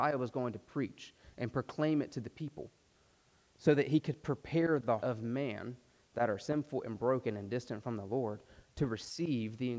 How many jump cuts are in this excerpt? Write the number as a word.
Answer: one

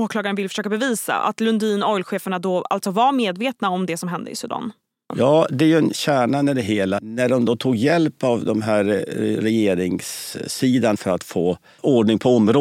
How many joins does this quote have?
zero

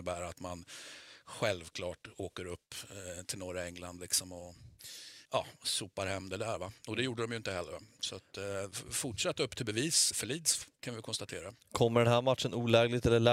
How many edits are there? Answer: two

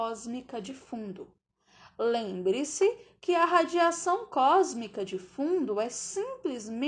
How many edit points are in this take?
zero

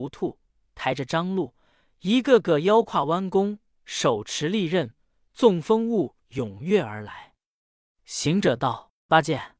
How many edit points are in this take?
zero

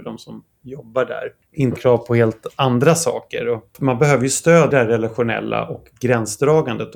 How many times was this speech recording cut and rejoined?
two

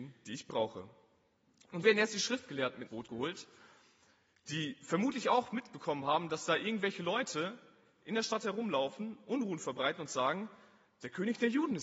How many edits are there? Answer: two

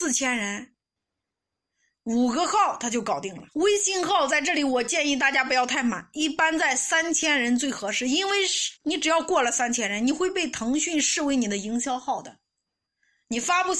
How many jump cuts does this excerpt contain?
two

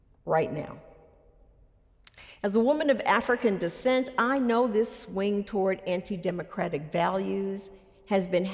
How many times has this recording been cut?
zero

